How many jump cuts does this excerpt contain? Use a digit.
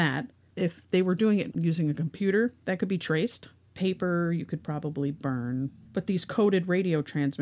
0